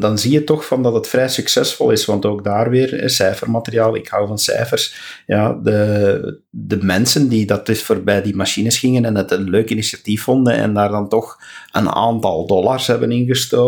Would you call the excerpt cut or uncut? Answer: uncut